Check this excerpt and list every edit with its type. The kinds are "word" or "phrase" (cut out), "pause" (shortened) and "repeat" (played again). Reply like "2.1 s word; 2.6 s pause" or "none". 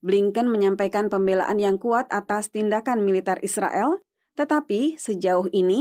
none

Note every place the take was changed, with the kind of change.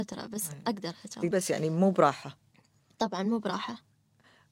1.3 s word

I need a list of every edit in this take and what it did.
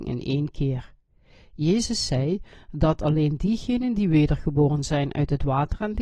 none

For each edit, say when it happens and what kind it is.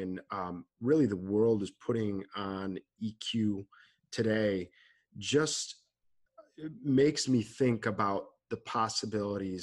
none

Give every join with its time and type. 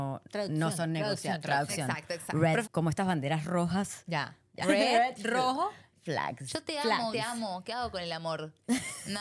2.6 s word; 4.6 s word; 7.1 s word

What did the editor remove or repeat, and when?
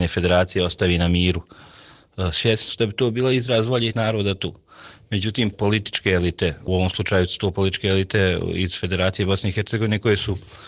3.9 s word; 5.5 s phrase; 6.7 s word

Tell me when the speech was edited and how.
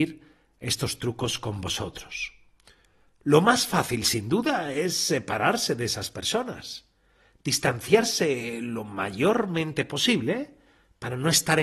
none

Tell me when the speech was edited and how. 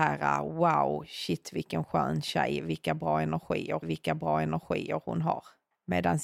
3.8 s repeat

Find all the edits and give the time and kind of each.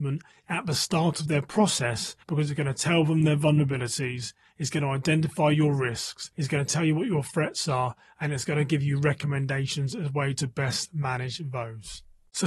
2.2 s pause

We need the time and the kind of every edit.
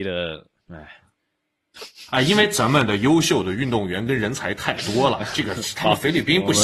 2.1 s pause

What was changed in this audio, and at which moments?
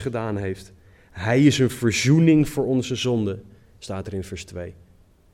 none

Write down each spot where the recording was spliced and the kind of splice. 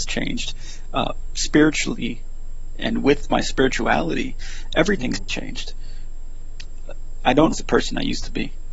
2.8 s word; 7.5 s word

